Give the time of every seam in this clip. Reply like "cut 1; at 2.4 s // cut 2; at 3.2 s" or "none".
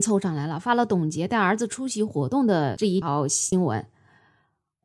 none